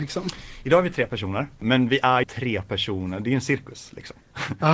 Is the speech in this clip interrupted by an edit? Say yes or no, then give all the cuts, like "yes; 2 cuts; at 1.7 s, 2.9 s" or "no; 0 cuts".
yes; 1 cut; at 2.2 s